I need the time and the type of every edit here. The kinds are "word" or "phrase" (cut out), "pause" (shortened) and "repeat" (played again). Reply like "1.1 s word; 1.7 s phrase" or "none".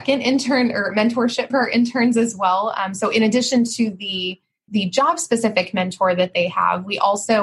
1.5 s word; 4.7 s word